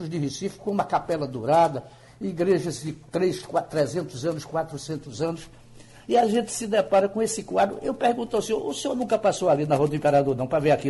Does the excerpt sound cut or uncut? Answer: uncut